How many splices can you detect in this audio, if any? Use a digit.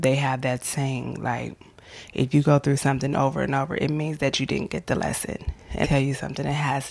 1